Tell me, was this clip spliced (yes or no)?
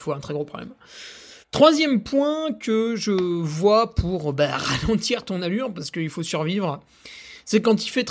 yes